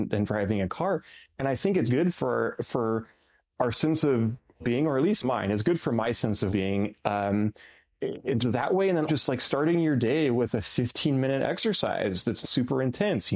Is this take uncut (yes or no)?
no